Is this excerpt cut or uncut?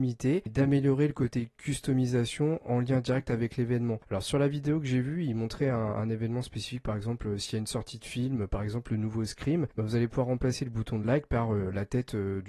uncut